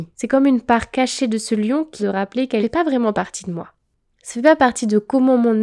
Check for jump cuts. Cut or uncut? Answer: cut